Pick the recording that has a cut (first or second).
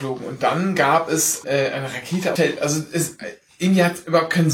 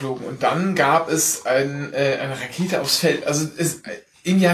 first